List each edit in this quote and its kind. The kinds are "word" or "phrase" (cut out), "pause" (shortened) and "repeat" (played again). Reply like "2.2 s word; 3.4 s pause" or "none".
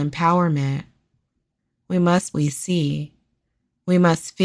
2.3 s phrase